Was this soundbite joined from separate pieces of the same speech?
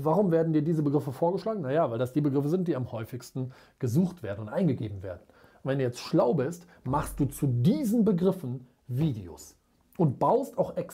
no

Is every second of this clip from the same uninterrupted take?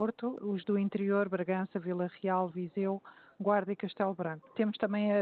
yes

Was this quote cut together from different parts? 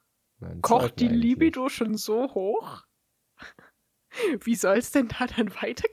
no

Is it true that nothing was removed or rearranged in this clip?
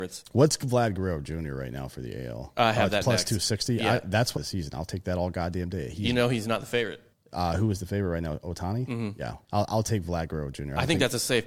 no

